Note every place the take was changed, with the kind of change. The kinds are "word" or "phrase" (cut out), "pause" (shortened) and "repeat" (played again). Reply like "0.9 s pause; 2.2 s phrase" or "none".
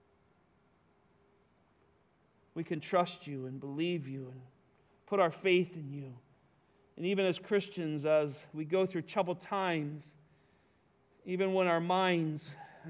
none